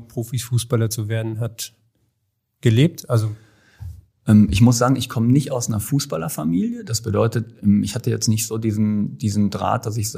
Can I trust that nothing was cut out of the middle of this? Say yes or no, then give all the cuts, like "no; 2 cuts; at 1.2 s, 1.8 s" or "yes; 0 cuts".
yes; 0 cuts